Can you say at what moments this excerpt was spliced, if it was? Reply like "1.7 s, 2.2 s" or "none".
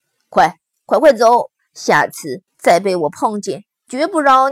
2.5 s